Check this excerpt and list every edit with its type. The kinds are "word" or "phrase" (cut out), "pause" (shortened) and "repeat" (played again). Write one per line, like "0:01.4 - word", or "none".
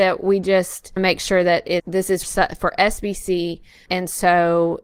0:01.0 - word
0:01.8 - word
0:02.2 - word
0:03.9 - word